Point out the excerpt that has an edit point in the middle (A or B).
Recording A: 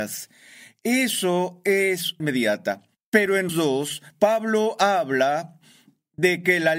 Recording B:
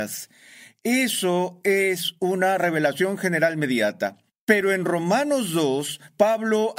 A